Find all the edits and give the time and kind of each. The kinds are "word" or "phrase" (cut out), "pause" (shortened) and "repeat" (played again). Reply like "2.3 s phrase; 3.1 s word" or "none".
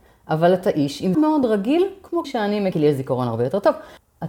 1.1 s phrase; 2.2 s phrase; 2.7 s phrase